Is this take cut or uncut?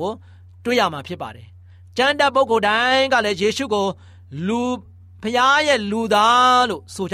uncut